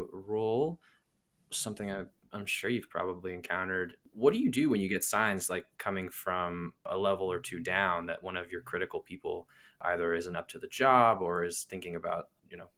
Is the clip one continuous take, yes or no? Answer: yes